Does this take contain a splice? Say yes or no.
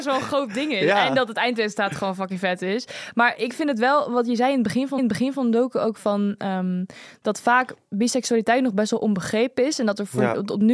yes